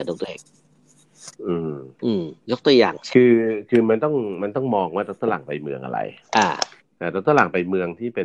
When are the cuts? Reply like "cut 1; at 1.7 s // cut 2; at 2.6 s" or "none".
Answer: cut 1; at 2.4 s // cut 2; at 6.8 s